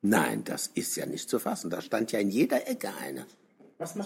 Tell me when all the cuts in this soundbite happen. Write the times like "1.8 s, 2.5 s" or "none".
none